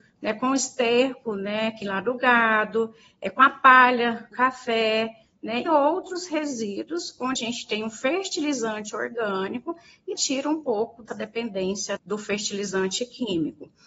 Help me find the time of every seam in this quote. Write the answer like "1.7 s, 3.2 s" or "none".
1.8 s, 4.3 s, 5.7 s, 7.4 s, 10.2 s, 11.1 s, 12.0 s